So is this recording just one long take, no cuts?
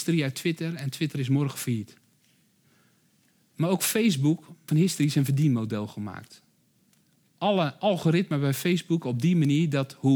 no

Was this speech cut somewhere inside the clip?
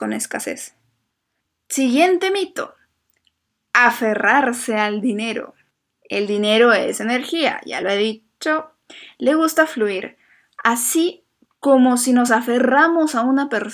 no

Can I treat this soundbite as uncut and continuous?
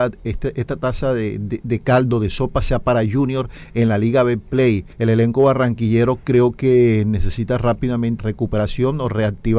no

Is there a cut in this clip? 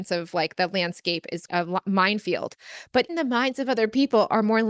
yes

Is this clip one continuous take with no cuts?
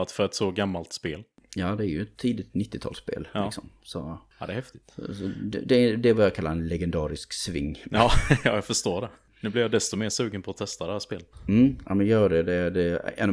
yes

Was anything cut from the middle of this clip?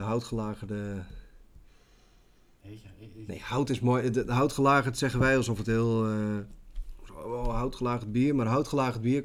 no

